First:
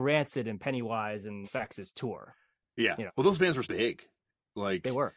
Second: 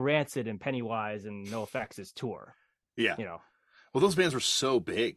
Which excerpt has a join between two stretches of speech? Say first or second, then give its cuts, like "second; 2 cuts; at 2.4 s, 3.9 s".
first; 3 cuts; at 1.4 s, 3.1 s, 3.6 s